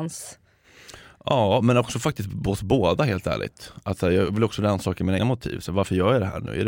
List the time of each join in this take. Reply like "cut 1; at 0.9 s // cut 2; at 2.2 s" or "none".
cut 1; at 5.2 s